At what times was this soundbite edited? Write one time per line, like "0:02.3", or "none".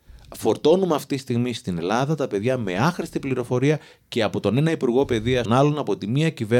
0:05.5